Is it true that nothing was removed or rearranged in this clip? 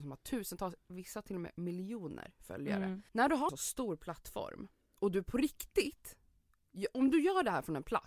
no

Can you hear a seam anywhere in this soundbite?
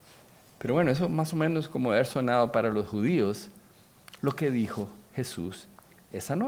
no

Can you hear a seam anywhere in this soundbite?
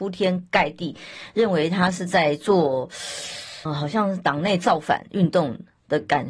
yes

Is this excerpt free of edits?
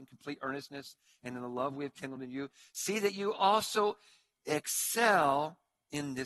yes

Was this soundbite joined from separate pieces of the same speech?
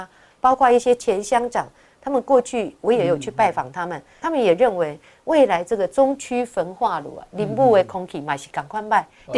no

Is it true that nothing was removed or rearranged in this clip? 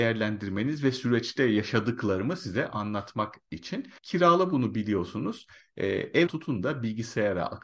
no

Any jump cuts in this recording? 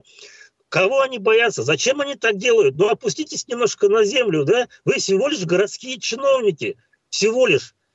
no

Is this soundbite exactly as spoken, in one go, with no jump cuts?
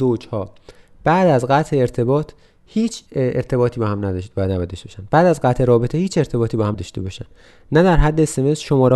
no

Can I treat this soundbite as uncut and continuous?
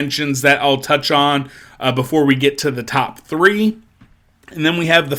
yes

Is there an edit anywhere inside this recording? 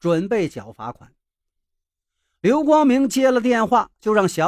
no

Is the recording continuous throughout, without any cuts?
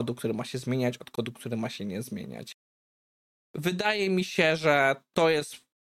yes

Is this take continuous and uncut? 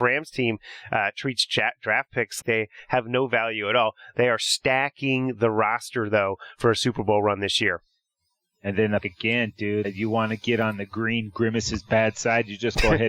no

